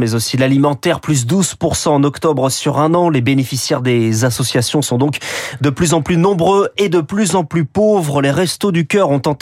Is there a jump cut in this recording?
no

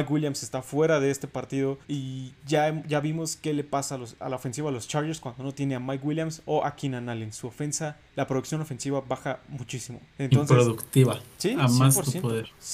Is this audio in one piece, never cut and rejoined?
no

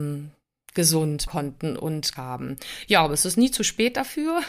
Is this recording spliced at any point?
yes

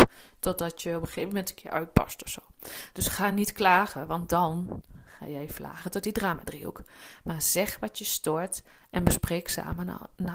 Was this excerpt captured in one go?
yes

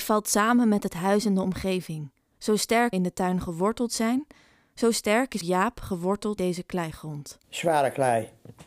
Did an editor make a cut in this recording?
yes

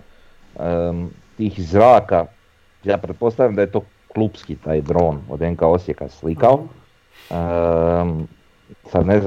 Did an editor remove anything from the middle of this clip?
no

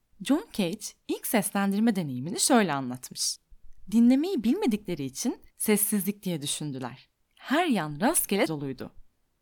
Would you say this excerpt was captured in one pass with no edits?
no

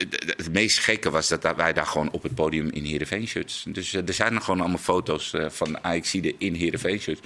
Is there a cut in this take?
no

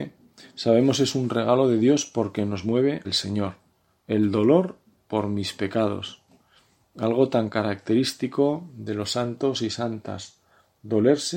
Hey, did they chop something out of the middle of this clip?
yes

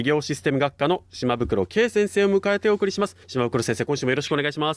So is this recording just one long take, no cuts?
no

